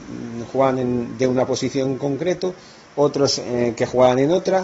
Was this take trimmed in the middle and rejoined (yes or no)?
no